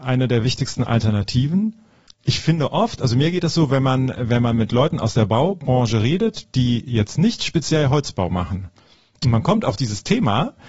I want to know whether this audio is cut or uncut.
uncut